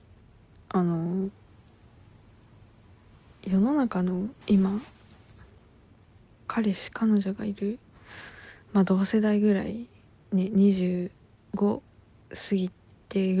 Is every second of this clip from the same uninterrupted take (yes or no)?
no